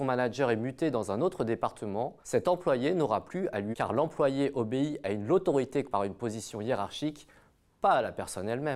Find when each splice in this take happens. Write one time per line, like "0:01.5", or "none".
0:02.2
0:03.7
0:05.8

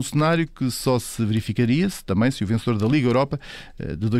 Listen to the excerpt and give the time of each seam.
none

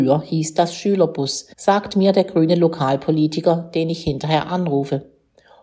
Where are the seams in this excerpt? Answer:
0:01.5

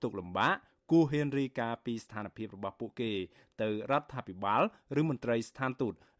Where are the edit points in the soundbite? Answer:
none

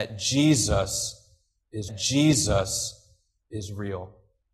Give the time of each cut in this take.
0:01.9

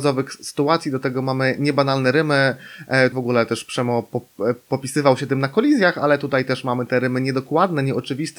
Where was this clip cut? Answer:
0:03.1

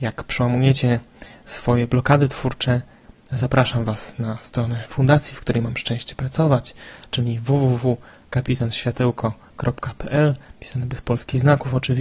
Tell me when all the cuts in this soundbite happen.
none

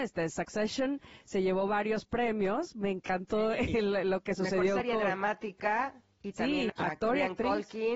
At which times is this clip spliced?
0:06.7

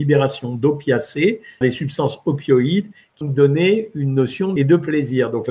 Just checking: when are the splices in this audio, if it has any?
0:01.6
0:03.2
0:04.6

